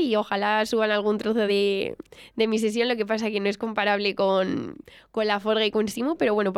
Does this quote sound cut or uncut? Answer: uncut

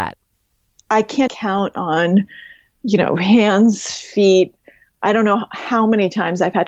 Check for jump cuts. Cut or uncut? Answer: cut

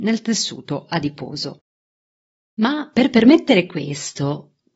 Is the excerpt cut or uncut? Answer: uncut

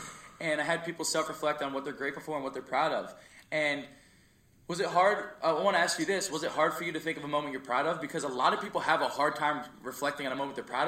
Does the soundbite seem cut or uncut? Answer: uncut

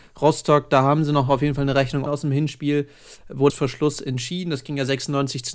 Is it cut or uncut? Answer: cut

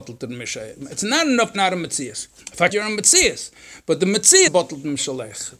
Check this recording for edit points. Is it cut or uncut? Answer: cut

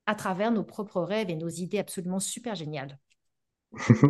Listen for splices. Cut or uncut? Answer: uncut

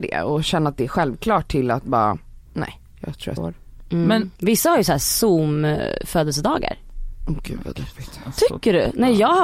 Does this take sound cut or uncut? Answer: cut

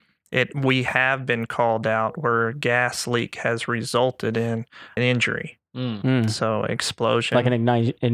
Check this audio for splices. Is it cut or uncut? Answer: cut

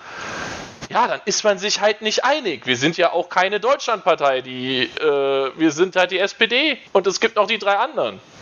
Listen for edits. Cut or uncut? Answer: cut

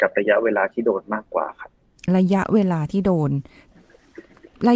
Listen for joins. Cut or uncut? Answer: uncut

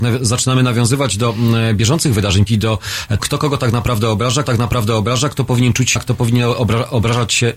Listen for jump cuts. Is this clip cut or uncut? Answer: cut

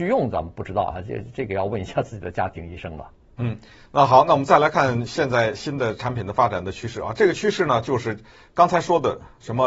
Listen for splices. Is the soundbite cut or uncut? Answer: uncut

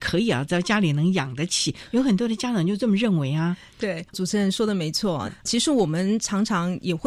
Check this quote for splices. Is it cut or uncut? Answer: cut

